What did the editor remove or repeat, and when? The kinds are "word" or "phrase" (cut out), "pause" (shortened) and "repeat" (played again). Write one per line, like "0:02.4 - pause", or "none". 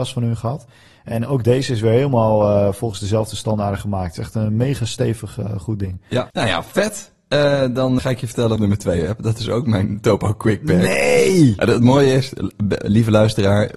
0:06.3 - pause
0:08.0 - word
0:08.6 - phrase